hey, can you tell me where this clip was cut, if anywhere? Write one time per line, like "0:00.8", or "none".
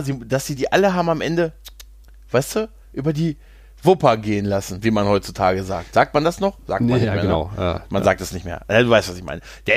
none